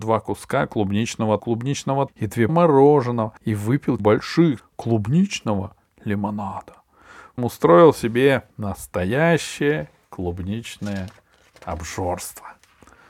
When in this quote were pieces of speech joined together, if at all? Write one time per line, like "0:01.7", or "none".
0:01.4
0:02.1
0:02.5
0:03.4
0:04.0
0:04.6
0:07.4
0:08.5